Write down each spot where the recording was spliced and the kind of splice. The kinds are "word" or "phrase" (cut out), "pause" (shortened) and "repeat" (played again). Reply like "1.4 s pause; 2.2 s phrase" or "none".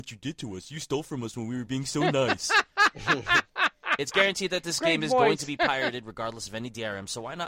none